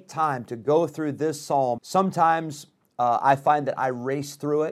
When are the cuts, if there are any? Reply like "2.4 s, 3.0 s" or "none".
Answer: 1.8 s